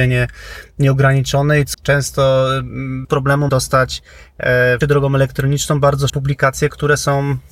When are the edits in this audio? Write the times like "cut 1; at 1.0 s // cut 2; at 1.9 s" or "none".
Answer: cut 1; at 1.7 s // cut 2; at 3.0 s // cut 3; at 3.5 s // cut 4; at 4.8 s // cut 5; at 6.1 s